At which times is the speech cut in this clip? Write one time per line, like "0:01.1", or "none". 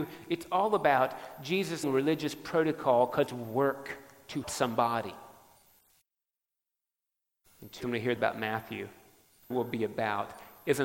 0:01.8
0:03.3
0:04.4
0:07.8
0:08.2
0:09.5